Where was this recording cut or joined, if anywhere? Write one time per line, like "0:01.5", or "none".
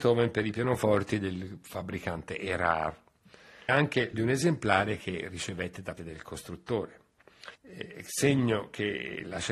0:03.7
0:04.1
0:06.0
0:07.5